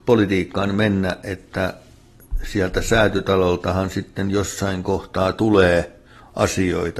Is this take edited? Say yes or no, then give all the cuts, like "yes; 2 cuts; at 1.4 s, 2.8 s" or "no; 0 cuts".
no; 0 cuts